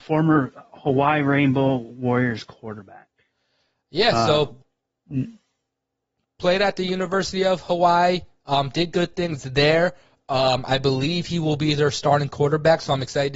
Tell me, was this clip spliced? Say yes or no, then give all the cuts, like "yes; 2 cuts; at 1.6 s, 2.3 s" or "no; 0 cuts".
no; 0 cuts